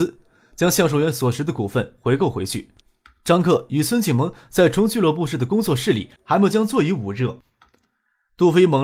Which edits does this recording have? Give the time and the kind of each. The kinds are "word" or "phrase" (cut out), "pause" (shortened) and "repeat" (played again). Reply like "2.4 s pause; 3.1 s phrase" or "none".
none